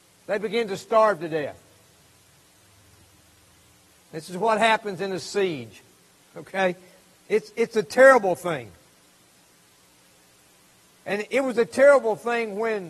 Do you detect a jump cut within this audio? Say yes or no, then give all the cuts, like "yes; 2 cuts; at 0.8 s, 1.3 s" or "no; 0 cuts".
no; 0 cuts